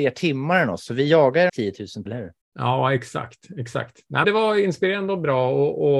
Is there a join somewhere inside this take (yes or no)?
yes